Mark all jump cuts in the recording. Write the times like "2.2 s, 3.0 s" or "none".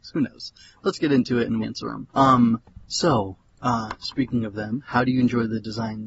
1.6 s, 2.1 s